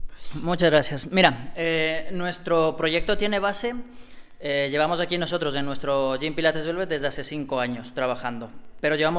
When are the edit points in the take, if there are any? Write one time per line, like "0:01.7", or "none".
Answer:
none

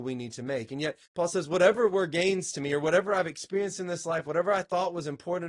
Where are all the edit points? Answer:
0:01.1

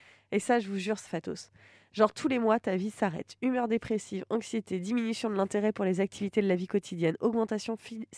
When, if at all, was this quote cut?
0:01.1

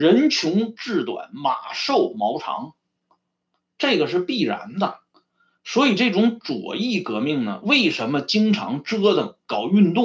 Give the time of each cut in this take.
none

